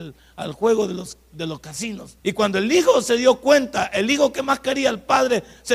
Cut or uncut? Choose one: cut